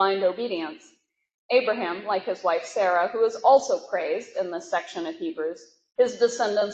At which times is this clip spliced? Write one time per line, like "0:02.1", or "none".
none

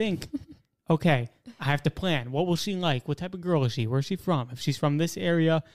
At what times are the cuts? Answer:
none

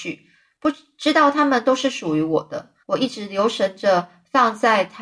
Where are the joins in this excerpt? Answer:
0:02.8

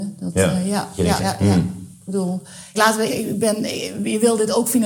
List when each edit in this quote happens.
0:01.2
0:02.7
0:03.1

